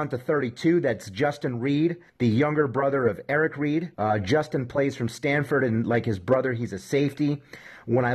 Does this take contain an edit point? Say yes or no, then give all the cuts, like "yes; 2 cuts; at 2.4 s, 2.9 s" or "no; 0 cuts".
yes; 2 cuts; at 2.1 s, 3.9 s